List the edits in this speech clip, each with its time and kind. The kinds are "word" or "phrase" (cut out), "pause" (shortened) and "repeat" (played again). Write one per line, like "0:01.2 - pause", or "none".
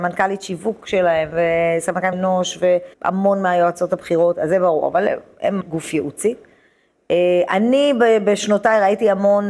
0:02.1 - word
0:02.9 - pause
0:05.6 - word